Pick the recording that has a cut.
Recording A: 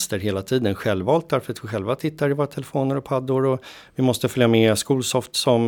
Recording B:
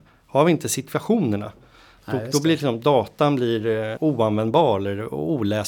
B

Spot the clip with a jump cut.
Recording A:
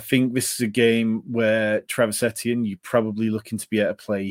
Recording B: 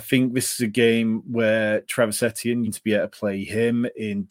B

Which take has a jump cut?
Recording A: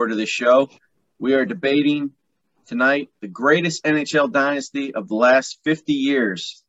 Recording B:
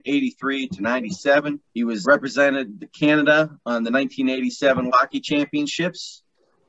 B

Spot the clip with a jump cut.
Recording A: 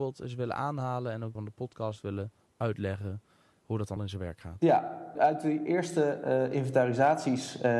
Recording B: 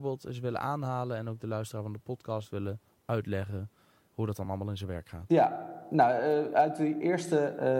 A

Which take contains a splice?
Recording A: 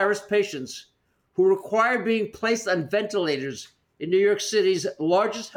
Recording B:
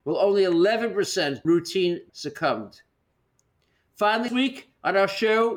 B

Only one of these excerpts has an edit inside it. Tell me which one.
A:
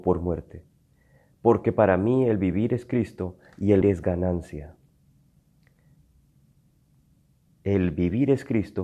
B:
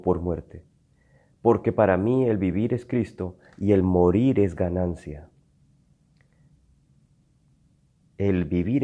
A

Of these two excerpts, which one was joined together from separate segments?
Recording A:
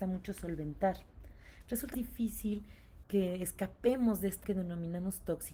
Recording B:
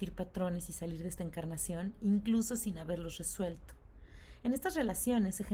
A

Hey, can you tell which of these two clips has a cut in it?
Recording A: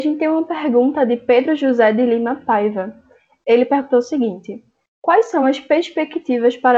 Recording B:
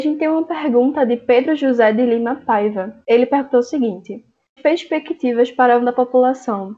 B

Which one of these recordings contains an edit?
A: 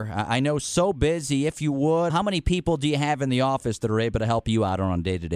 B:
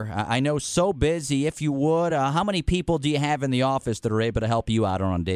A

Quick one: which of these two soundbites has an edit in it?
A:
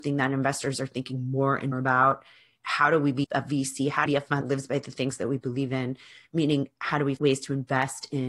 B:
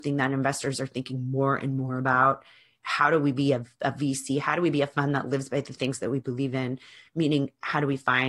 A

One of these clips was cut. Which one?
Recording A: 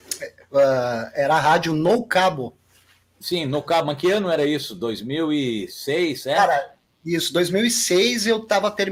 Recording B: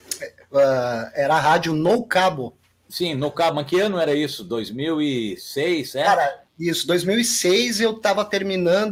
B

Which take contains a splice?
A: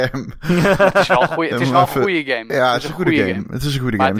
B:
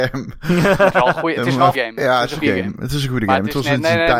B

